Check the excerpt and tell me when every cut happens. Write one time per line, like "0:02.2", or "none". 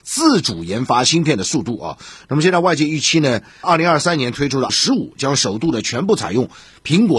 0:03.6
0:04.7